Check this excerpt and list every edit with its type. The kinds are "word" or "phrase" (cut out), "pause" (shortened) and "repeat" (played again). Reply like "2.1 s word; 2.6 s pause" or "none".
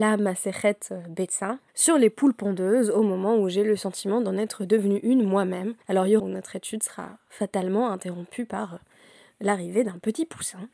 1.7 s pause; 5.8 s pause; 6.2 s phrase